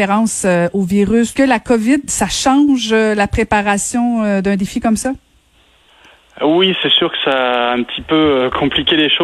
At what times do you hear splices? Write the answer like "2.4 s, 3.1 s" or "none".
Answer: 1.4 s